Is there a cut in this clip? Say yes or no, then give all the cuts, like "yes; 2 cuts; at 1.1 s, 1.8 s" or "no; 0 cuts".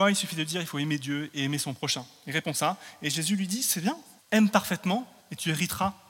yes; 2 cuts; at 4.2 s, 5.2 s